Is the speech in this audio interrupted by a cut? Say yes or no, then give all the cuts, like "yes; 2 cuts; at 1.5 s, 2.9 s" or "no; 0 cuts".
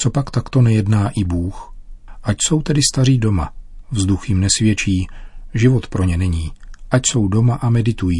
no; 0 cuts